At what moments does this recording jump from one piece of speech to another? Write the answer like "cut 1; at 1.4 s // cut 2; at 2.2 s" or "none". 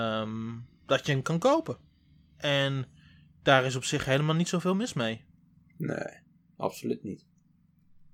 none